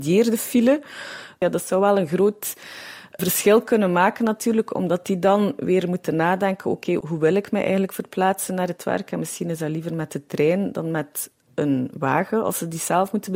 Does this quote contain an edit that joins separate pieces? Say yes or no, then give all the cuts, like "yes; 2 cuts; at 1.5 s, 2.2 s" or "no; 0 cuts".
no; 0 cuts